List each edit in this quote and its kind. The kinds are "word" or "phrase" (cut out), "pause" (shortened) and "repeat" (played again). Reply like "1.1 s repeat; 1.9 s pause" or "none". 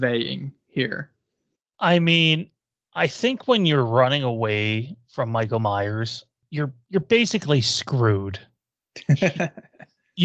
none